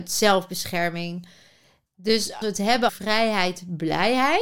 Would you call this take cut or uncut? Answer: cut